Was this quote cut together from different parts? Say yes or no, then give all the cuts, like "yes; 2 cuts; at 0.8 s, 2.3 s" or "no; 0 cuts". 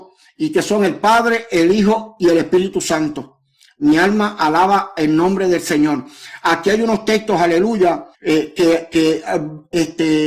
yes; 1 cut; at 8.1 s